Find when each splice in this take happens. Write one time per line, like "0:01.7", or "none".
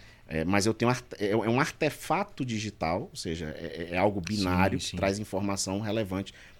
none